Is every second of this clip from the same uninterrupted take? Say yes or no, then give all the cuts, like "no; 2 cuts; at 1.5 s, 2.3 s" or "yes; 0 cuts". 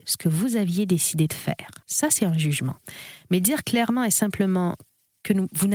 no; 1 cut; at 1.8 s